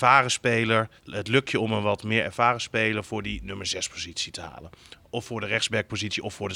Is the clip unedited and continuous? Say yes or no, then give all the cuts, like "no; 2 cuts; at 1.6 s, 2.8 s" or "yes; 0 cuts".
no; 1 cut; at 1.0 s